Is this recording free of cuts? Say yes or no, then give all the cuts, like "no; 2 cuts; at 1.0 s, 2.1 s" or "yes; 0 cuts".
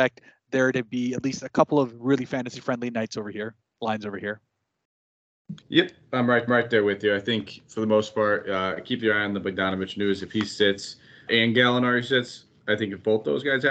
no; 3 cuts; at 5.6 s, 6.5 s, 11.3 s